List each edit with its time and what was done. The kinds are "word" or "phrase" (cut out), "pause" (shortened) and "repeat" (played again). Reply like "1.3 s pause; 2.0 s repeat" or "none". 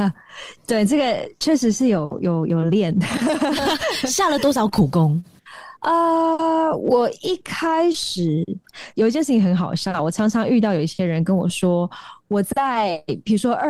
5.8 s pause; 8.9 s pause